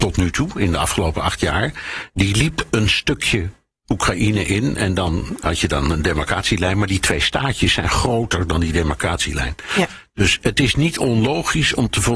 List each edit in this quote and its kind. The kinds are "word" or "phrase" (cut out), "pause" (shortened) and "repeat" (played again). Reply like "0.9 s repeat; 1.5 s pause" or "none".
none